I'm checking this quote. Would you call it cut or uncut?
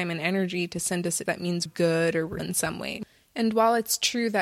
cut